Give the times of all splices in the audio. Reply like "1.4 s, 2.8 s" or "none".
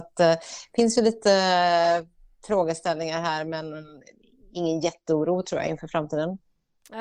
none